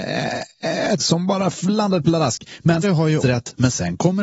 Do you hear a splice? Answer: yes; 3 cuts; at 1.0 s, 2.8 s, 3.2 s

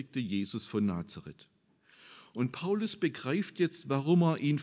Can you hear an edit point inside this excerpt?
no; 0 cuts

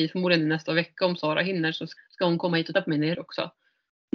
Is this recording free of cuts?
no; 3 cuts; at 2.0 s, 2.7 s, 3.1 s

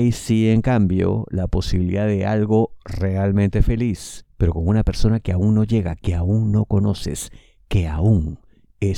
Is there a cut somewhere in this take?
no; 0 cuts

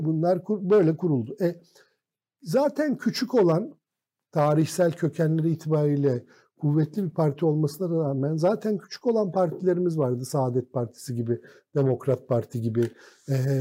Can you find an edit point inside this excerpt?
no; 0 cuts

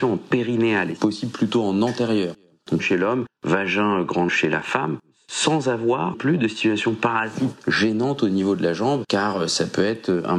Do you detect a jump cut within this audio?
yes; 4 cuts; at 1.0 s, 2.8 s, 4.3 s, 6.1 s

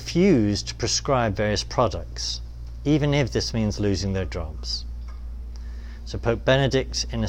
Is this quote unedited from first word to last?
yes; 0 cuts

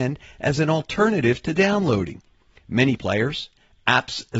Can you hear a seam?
yes; 1 cut; at 3.0 s

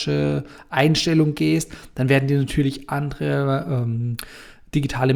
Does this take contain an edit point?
no; 0 cuts

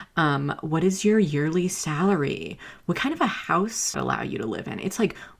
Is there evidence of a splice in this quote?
yes; 1 cut; at 3.9 s

